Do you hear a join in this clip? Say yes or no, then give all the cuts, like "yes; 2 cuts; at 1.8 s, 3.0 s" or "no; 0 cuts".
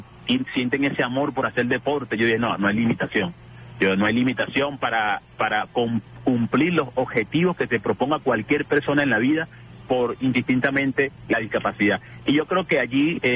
no; 0 cuts